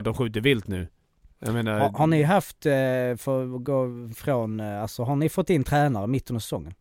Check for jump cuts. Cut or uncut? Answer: uncut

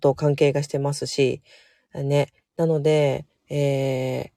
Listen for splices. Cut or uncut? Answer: uncut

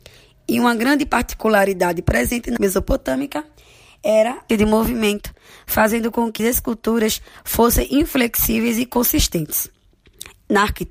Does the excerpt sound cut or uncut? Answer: cut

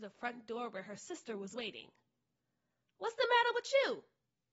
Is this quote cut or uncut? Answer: uncut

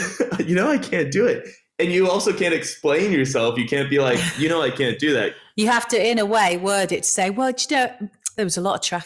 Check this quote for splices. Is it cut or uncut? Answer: uncut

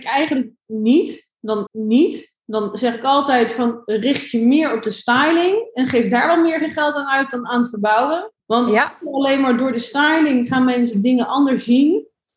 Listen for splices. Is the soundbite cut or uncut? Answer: cut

